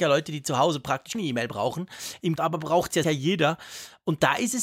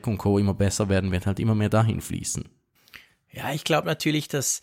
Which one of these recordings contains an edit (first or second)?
first